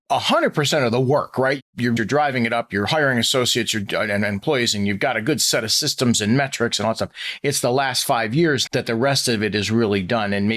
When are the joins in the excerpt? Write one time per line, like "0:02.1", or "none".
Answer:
0:02.0
0:08.7